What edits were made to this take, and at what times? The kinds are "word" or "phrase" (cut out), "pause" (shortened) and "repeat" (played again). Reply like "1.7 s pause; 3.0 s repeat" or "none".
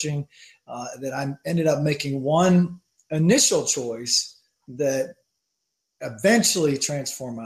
none